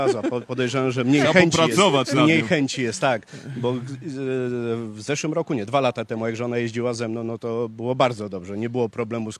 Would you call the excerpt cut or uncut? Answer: uncut